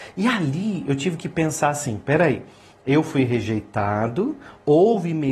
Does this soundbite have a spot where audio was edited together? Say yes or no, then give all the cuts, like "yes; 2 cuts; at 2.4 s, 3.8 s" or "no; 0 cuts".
no; 0 cuts